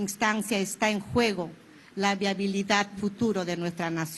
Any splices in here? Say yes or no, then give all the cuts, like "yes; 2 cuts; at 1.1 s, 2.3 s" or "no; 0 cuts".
yes; 1 cut; at 3.0 s